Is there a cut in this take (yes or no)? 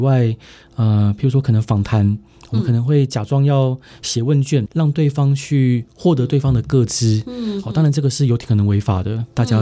yes